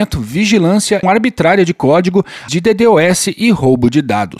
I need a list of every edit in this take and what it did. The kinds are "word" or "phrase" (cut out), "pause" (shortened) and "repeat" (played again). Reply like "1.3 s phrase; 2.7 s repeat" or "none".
1.0 s word; 2.5 s word

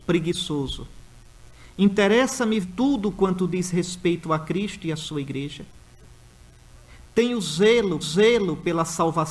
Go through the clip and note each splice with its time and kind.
2.6 s word; 8.0 s repeat

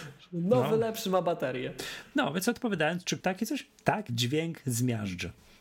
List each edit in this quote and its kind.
3.2 s word; 4.1 s word

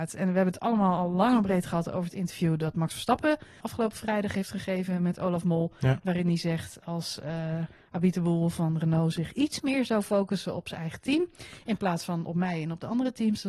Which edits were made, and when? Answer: 3.6 s word

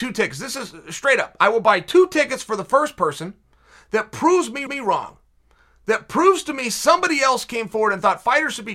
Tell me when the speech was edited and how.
4.7 s repeat

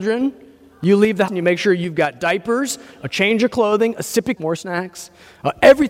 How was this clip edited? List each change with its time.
1.3 s word; 4.4 s phrase

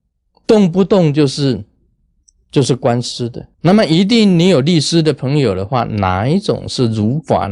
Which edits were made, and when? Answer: 3.5 s pause

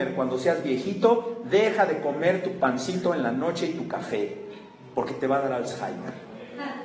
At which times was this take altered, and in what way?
none

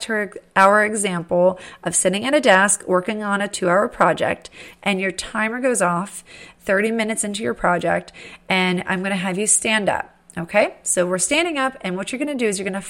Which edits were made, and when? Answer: none

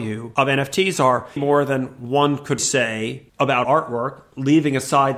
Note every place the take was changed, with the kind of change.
1.4 s word; 2.6 s word; 3.6 s word

